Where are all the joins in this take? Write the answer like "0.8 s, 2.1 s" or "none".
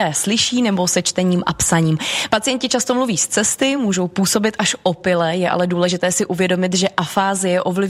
none